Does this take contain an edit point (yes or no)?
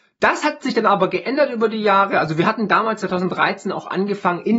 no